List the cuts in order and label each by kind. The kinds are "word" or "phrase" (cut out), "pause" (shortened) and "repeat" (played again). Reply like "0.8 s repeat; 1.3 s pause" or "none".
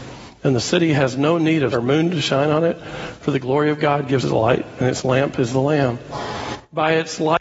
1.7 s word; 4.2 s word